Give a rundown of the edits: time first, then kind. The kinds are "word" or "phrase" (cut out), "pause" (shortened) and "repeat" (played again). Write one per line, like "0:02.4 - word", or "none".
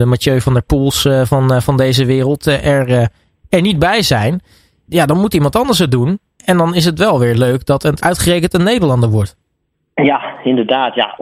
none